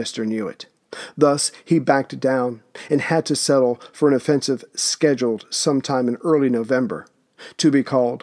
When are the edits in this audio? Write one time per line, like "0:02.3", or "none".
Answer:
none